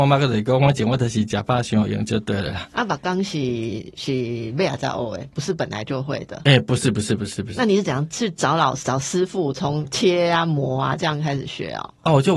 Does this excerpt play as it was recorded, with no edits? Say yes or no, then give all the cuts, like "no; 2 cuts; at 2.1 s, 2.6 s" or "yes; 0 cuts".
yes; 0 cuts